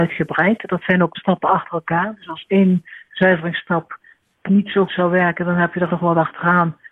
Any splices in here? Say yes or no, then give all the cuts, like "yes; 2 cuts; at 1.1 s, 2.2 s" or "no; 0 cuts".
yes; 4 cuts; at 1.1 s, 4.5 s, 4.9 s, 5.9 s